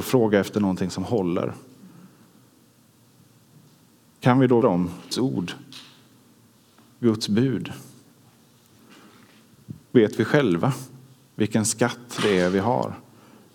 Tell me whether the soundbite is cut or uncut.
cut